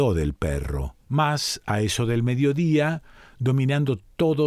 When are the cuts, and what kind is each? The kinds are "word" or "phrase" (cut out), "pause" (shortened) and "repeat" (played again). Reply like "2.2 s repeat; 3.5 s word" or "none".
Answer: 1.0 s pause